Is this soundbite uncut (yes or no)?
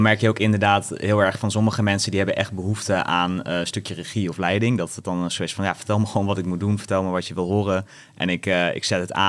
yes